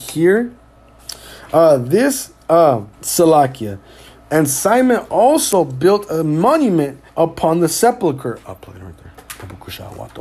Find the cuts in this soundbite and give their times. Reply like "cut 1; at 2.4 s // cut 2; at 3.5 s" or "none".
cut 1; at 2.9 s // cut 2; at 7.1 s

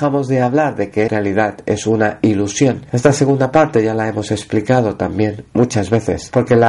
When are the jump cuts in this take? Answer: cut 1; at 1.1 s

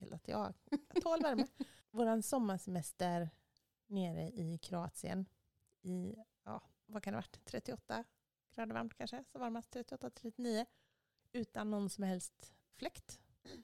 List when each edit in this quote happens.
cut 1; at 6.9 s // cut 2; at 12.7 s

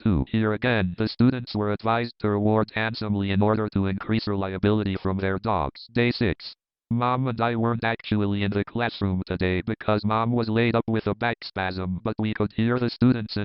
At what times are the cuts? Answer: none

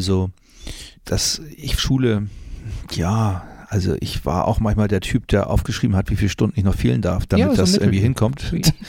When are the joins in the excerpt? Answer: cut 1; at 1.0 s // cut 2; at 1.8 s

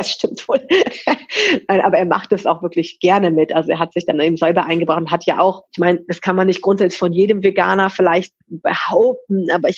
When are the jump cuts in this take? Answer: cut 1; at 5.7 s

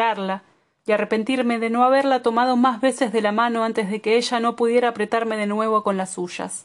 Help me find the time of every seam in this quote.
none

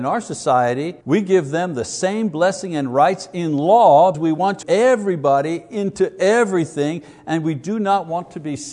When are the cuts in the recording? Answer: cut 1; at 1.0 s // cut 2; at 4.1 s // cut 3; at 4.6 s

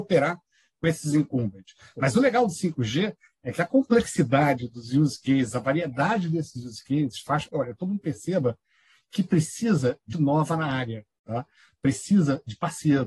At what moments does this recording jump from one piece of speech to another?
cut 1; at 7.5 s // cut 2; at 10.1 s

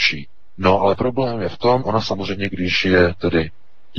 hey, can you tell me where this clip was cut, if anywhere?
cut 1; at 1.8 s

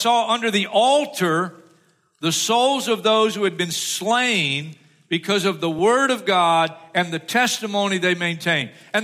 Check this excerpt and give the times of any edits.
none

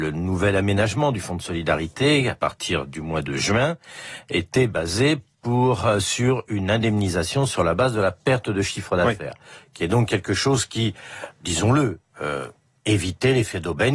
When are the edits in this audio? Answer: none

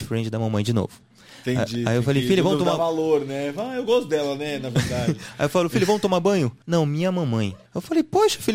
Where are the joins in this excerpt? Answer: cut 1; at 6.6 s // cut 2; at 7.7 s

